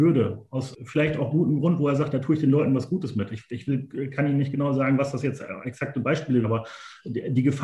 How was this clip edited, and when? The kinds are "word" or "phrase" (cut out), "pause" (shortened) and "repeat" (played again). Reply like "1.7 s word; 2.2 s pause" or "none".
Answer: 6.4 s word